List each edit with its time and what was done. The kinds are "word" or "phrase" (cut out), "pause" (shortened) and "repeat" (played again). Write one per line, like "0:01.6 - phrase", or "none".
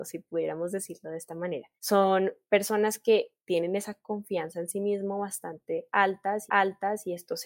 0:01.8 - pause
0:06.5 - repeat

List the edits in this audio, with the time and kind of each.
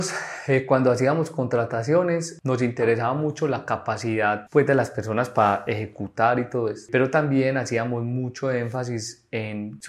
none

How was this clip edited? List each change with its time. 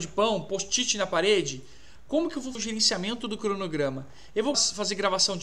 0:02.6 - word
0:04.5 - word

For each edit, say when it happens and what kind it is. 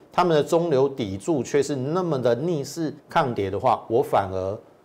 0:03.0 - pause

